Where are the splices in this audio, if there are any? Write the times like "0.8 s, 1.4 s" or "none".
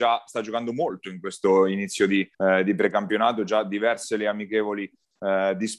2.3 s